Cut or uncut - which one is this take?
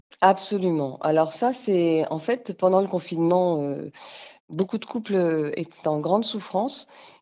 uncut